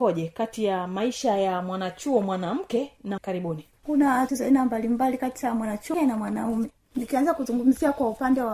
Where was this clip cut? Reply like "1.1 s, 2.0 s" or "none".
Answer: 3.2 s, 4.3 s, 5.9 s